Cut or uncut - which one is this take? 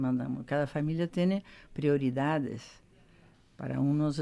uncut